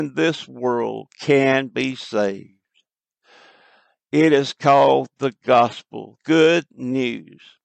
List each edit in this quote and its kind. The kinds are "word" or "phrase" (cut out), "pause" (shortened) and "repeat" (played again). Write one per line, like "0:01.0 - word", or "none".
0:06.2 - word